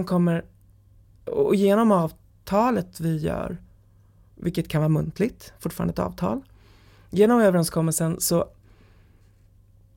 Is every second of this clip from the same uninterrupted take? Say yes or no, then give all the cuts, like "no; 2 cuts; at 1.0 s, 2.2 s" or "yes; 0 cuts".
yes; 0 cuts